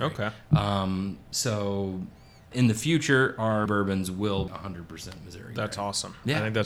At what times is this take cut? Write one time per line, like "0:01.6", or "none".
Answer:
0:02.5
0:03.7
0:04.5